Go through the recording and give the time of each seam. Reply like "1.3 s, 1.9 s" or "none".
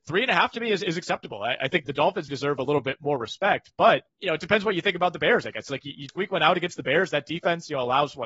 1.8 s, 2.3 s, 4.1 s, 6.1 s